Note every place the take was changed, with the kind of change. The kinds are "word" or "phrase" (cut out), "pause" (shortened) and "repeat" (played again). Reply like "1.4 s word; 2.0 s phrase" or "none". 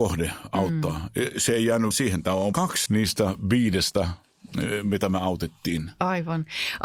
1.9 s word; 2.5 s word; 2.9 s word